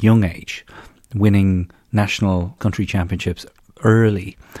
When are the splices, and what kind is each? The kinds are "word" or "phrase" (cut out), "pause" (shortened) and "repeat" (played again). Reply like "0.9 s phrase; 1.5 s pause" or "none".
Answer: 2.6 s word; 3.6 s pause

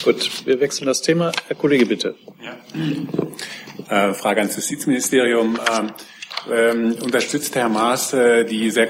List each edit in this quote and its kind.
none

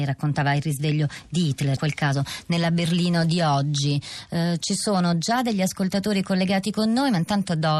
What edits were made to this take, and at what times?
1.8 s word

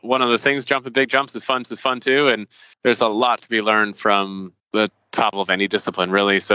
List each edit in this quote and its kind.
1.6 s repeat; 2.7 s pause; 4.6 s pause; 5.3 s word

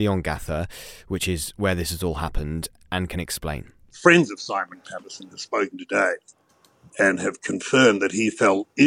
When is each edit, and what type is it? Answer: none

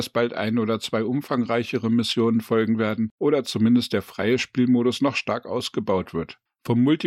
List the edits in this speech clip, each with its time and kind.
none

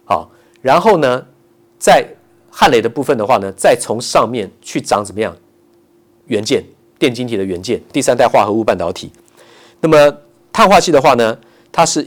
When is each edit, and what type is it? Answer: 7.9 s word

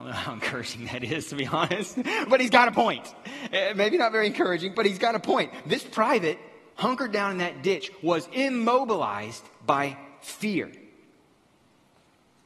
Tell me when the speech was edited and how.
4.7 s word; 6.7 s pause

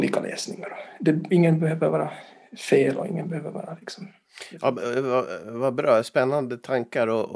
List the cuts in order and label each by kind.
none

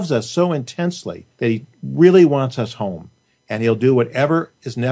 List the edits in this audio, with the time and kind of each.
1.3 s pause

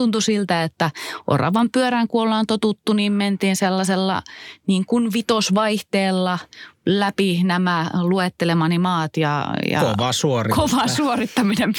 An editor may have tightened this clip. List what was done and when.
6.8 s pause

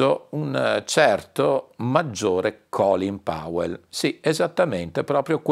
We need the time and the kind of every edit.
none

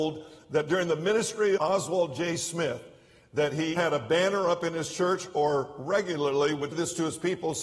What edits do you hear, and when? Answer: 1.6 s word; 3.8 s word; 6.7 s word

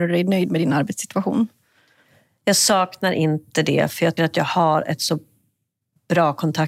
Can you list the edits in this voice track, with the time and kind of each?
4.2 s word

